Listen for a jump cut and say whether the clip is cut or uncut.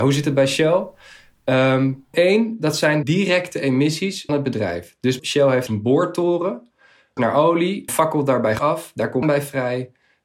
cut